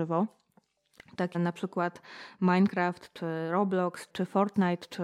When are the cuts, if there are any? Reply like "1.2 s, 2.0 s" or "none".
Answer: 1.3 s, 4.1 s